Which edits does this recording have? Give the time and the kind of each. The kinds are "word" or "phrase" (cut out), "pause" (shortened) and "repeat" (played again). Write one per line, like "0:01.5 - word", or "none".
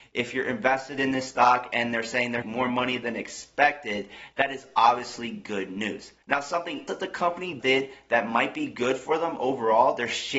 0:02.4 - phrase
0:06.2 - pause
0:06.9 - word
0:07.6 - word